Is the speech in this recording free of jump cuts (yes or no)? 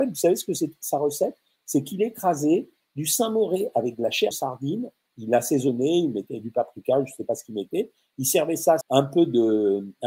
no